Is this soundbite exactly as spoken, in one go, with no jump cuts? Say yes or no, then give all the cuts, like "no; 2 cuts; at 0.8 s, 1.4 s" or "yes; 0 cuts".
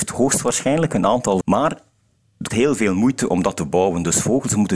no; 2 cuts; at 1.4 s, 2.5 s